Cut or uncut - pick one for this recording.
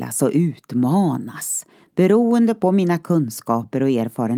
uncut